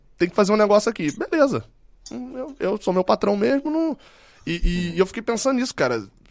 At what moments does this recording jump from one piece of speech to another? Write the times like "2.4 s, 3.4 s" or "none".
none